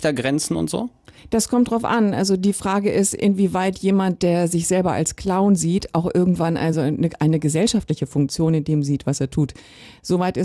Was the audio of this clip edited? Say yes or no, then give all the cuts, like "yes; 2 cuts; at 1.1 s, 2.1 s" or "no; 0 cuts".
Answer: no; 0 cuts